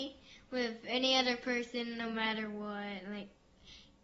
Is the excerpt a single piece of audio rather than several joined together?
yes; 0 cuts

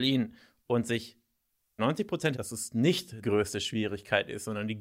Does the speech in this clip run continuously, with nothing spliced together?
no; 3 cuts; at 1.8 s, 2.3 s, 3.2 s

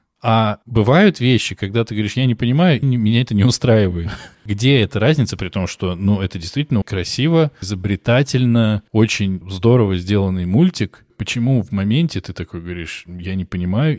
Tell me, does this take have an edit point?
yes; 4 cuts; at 2.8 s, 4.3 s, 6.8 s, 7.6 s

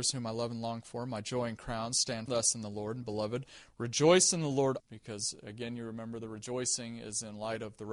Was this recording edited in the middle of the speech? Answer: yes; 3 cuts; at 2.3 s, 3.0 s, 4.8 s

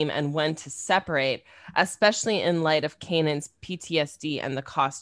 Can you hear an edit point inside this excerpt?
no; 0 cuts

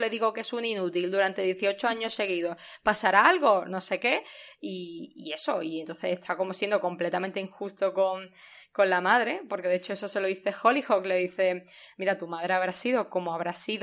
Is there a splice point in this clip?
no; 0 cuts

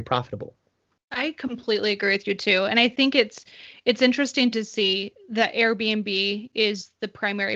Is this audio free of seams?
yes; 0 cuts

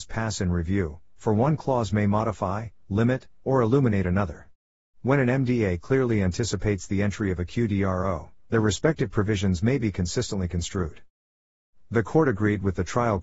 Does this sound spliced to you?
no; 0 cuts

